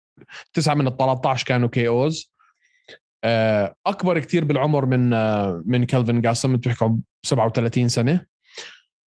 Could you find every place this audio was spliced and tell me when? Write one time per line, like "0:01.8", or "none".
0:03.8